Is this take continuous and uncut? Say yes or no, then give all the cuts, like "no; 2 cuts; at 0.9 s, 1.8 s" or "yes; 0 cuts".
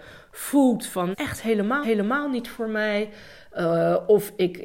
no; 2 cuts; at 1.1 s, 1.8 s